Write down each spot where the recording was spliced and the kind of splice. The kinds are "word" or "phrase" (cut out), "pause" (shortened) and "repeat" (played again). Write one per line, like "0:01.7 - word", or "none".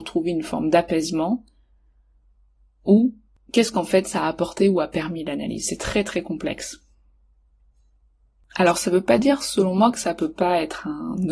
none